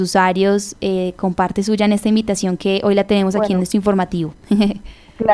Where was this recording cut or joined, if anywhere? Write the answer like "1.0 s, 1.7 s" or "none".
none

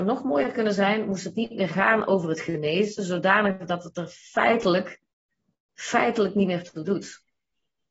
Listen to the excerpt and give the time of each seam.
none

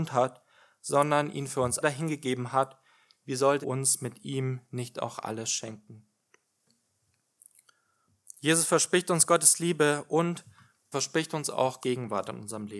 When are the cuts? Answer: 1.8 s, 3.6 s, 10.9 s, 11.8 s

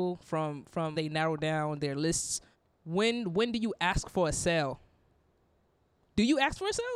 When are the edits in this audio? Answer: 0.9 s, 2.5 s

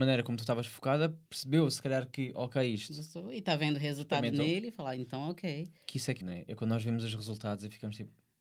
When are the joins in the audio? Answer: 1.3 s, 6.2 s

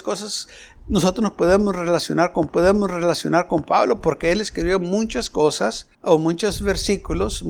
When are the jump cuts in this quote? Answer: 2.5 s, 5.9 s

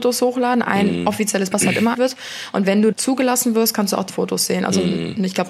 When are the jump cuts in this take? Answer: 1.5 s, 1.9 s, 2.9 s, 4.1 s

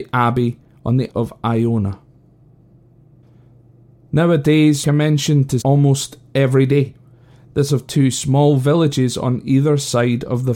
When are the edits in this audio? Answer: 1.1 s, 4.8 s, 5.6 s, 7.7 s

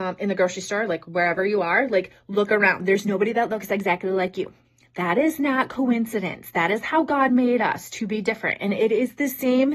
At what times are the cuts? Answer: none

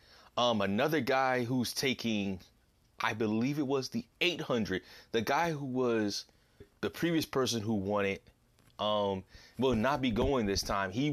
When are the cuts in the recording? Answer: 6.6 s

